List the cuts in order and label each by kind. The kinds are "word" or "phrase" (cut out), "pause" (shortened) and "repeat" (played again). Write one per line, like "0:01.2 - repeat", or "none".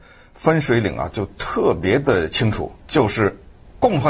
0:02.8 - pause